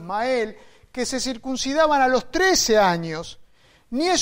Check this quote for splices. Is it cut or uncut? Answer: uncut